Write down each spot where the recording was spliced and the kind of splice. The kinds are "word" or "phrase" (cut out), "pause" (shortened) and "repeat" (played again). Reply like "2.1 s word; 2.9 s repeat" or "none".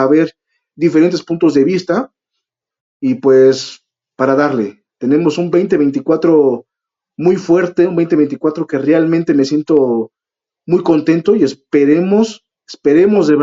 none